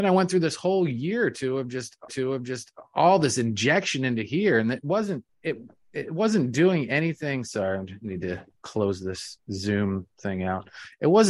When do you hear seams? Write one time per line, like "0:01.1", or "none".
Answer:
0:02.1
0:05.3